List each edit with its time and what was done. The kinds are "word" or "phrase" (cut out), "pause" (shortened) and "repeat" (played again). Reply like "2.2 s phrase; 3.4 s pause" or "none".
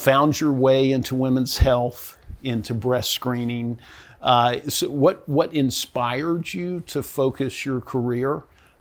none

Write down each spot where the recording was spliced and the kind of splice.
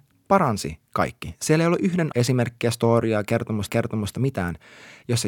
2.1 s word; 3.7 s repeat

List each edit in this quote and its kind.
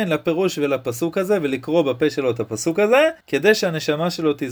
3.2 s pause

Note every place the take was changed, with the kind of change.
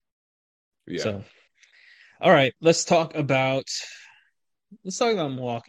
1.5 s pause; 2.6 s pause

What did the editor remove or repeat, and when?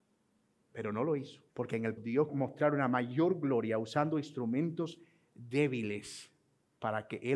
1.5 s pause; 2.0 s word; 2.3 s phrase

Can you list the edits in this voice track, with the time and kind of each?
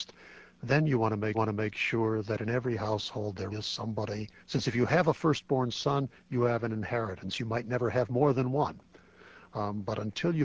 1.3 s repeat; 3.5 s word; 4.4 s pause

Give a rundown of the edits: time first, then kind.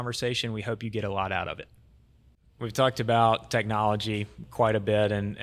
none

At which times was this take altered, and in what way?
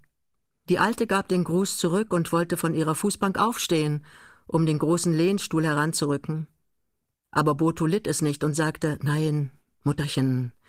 none

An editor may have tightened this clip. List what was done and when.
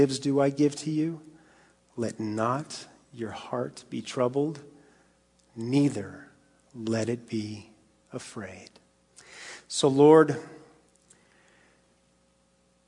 none

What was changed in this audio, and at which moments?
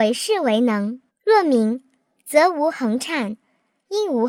1.1 s pause

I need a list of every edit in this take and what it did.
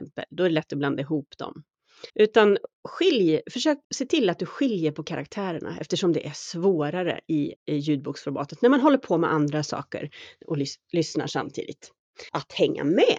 2.1 s pause; 3.8 s pause; 7.6 s pause; 12.3 s pause

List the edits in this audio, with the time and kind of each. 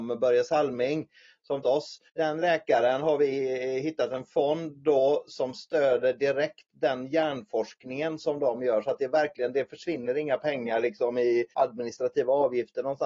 1.6 s phrase; 2.1 s pause; 11.5 s pause

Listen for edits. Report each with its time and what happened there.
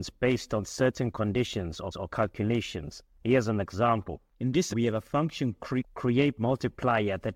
1.9 s repeat; 4.3 s pause; 4.7 s word; 5.8 s word

